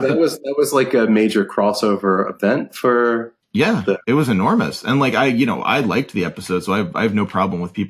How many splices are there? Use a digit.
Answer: 1